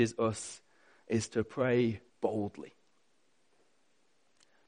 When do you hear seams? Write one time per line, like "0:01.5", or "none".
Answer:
0:02.1